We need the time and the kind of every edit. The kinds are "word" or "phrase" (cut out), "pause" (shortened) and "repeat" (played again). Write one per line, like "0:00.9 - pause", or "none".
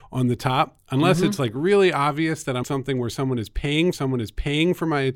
0:02.6 - phrase
0:03.9 - repeat